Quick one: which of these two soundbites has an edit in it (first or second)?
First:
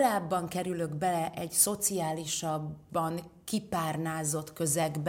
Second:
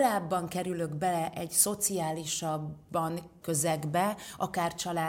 second